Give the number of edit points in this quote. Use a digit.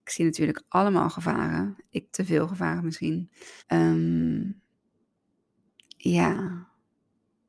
2